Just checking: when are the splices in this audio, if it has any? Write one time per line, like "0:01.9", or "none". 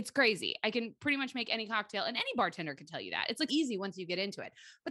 0:03.5

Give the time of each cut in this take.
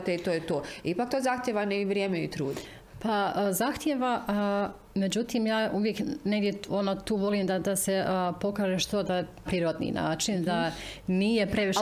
0:09.5

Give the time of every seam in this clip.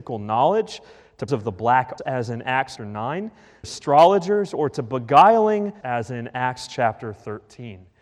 0:01.3
0:02.0
0:02.8
0:03.6
0:05.8

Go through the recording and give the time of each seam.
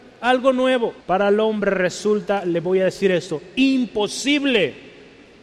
0:01.0

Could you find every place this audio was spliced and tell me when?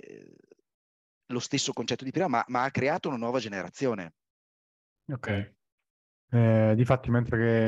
none

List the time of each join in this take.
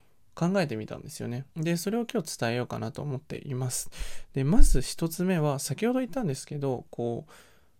0:01.5

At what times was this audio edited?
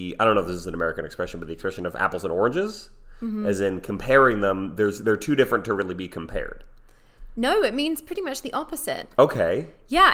none

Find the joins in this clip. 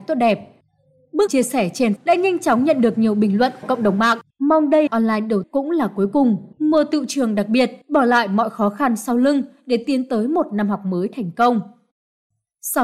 0:01.3
0:02.0
0:03.6
0:04.3
0:04.9
0:05.4
0:06.5
0:07.8

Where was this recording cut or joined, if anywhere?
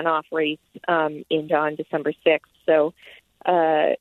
0:01.5

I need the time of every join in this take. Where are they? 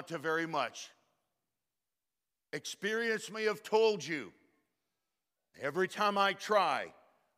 none

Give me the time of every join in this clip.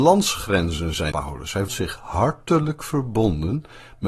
0:01.1
0:01.7

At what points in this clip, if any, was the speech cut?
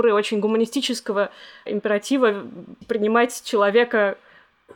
0:01.7
0:02.8

